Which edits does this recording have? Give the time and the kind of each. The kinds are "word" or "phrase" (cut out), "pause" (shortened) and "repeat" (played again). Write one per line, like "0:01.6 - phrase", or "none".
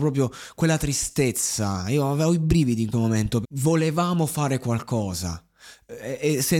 0:02.9 - word
0:03.4 - word